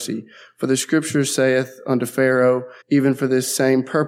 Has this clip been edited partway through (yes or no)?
yes